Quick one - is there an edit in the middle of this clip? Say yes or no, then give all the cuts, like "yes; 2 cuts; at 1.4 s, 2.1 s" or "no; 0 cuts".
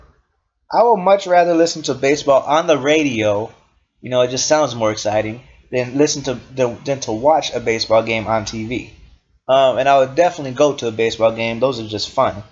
no; 0 cuts